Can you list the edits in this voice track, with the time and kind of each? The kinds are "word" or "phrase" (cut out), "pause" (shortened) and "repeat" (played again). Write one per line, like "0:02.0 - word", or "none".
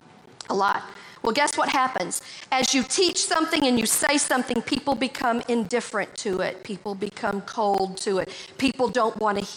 0:01.2 - pause